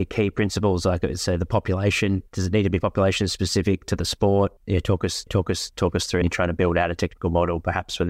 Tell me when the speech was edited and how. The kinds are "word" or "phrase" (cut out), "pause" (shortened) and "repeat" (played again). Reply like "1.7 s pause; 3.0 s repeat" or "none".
2.3 s pause; 4.6 s pause; 5.3 s repeat; 6.2 s phrase